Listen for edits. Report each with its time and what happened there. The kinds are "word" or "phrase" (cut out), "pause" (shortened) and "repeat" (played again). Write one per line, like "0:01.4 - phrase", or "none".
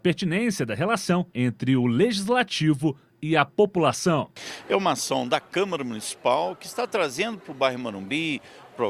0:01.3 - pause